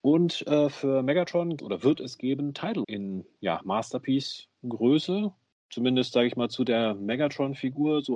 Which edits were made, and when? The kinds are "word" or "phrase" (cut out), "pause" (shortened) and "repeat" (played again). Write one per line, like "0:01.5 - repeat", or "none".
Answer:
0:01.6 - phrase
0:02.8 - word